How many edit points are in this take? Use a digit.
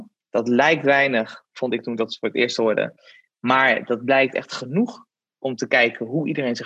0